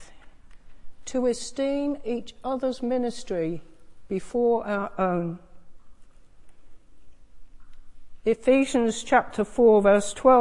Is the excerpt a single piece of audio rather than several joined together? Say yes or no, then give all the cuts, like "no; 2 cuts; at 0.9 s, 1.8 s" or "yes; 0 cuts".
yes; 0 cuts